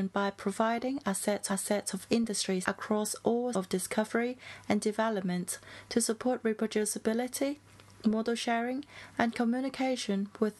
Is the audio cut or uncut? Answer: cut